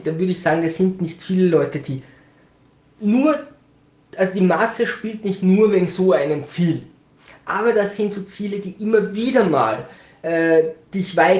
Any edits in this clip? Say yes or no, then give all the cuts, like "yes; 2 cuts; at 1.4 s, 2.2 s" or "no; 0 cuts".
no; 0 cuts